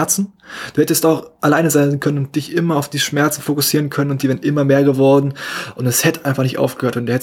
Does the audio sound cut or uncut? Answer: uncut